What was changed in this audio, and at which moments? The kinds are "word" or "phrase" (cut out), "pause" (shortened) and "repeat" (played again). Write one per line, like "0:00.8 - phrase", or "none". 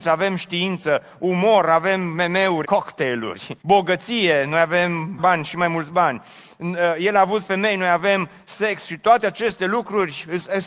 0:02.6 - phrase
0:03.6 - pause
0:05.2 - word